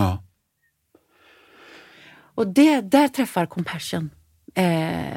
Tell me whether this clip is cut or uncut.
uncut